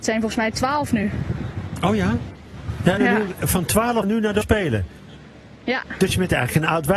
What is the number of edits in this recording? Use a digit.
4